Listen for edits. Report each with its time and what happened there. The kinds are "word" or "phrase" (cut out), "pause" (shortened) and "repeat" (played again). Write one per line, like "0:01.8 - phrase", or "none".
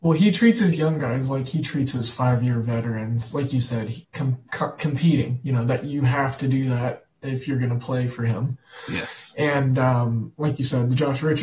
0:04.0 - pause